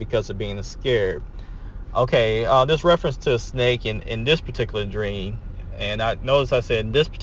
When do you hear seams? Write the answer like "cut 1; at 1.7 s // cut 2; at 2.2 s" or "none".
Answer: none